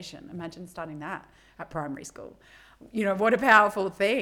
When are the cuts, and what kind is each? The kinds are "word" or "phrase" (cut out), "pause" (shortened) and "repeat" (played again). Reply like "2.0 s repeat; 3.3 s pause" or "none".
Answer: none